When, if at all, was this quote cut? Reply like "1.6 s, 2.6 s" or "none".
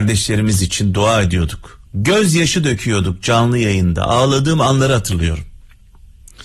1.9 s